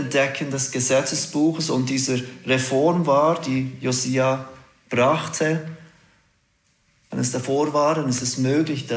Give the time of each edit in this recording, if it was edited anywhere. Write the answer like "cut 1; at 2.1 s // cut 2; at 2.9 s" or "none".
none